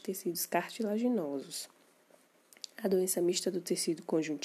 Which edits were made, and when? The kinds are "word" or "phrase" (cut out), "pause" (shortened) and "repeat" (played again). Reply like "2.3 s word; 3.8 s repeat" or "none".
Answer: none